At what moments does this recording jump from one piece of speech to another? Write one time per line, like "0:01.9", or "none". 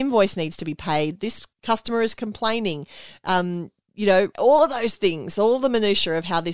0:01.5
0:04.3